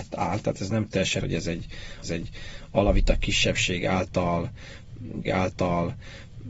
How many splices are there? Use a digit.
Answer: 3